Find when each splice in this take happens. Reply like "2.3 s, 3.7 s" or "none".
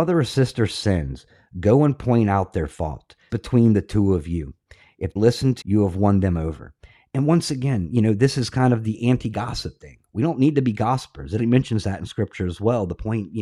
3.3 s, 5.2 s, 5.6 s, 11.4 s